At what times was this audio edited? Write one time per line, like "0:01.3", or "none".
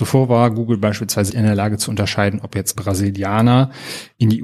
0:01.3
0:02.7